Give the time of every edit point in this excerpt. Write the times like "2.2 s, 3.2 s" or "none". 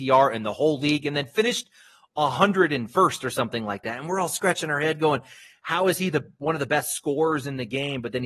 none